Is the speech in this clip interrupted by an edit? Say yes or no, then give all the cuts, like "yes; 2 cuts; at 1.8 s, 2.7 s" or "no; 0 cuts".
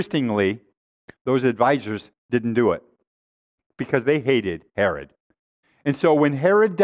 no; 0 cuts